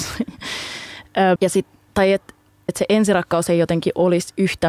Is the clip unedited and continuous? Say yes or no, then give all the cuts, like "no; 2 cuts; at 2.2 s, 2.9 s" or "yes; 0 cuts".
no; 2 cuts; at 1.4 s, 2.7 s